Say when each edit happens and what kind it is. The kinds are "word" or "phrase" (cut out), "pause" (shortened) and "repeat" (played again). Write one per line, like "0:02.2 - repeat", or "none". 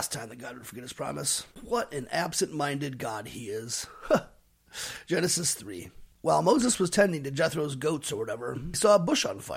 0:01.5 - pause
0:06.1 - pause